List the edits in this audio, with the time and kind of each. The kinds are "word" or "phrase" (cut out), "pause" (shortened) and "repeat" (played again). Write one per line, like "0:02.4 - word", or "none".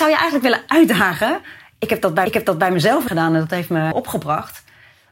0:02.3 - repeat
0:03.1 - word
0:03.9 - phrase